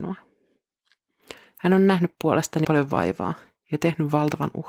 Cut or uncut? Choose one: cut